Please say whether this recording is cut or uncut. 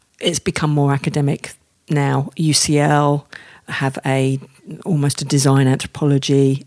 uncut